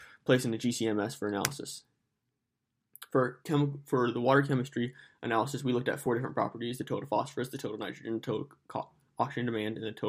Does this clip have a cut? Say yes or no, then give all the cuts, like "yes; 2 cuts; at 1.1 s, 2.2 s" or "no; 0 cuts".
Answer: no; 0 cuts